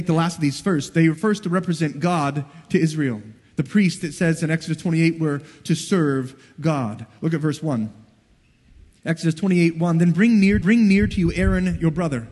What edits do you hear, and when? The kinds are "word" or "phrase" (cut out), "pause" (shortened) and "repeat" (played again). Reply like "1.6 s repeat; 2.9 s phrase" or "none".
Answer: 10.6 s repeat